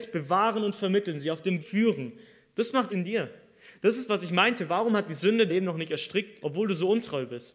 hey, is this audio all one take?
no; 5 cuts; at 1.6 s, 2.9 s, 4.1 s, 5.5 s, 6.4 s

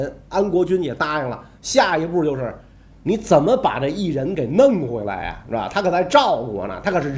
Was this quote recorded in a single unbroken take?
yes; 0 cuts

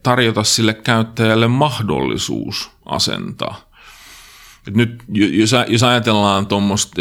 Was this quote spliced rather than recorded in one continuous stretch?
no; 0 cuts

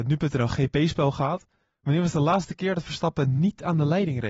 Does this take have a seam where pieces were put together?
no; 0 cuts

